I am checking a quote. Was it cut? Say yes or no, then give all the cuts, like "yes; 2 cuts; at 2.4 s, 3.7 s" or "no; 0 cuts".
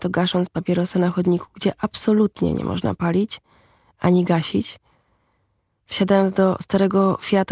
no; 0 cuts